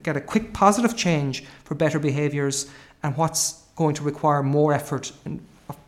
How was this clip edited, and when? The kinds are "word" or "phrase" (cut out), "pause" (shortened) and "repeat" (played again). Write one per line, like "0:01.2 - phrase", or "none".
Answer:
none